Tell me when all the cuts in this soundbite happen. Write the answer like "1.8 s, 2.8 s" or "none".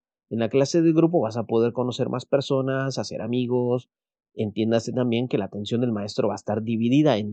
none

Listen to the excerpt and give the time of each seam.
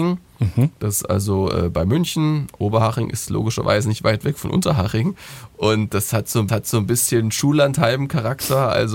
6.5 s

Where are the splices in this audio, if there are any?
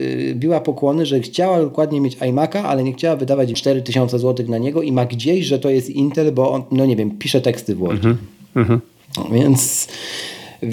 3.5 s

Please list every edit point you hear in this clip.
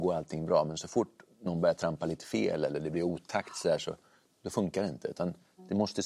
none

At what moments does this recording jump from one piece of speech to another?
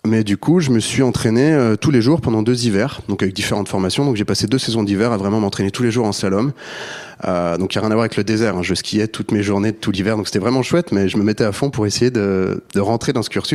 none

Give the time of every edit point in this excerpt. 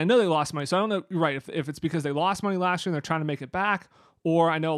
none

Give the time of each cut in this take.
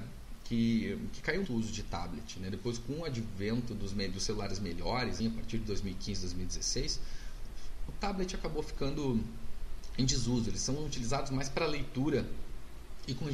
1.4 s, 5.2 s

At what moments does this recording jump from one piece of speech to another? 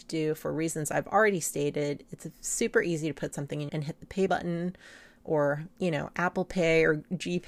3.7 s, 4.3 s

